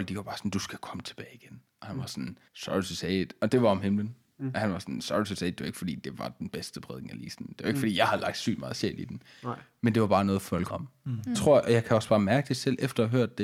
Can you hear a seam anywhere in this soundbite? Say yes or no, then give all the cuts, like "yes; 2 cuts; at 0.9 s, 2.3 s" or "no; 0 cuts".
yes; 3 cuts; at 2.5 s, 10.7 s, 11.3 s